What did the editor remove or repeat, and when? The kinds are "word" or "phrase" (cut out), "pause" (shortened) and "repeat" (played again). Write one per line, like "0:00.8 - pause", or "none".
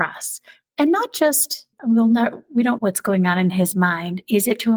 0:01.7 - word
0:02.8 - word